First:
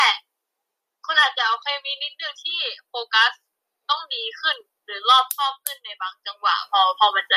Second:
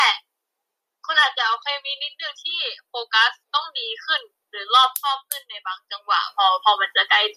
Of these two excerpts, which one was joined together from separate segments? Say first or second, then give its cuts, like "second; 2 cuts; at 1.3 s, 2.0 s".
second; 1 cut; at 3.4 s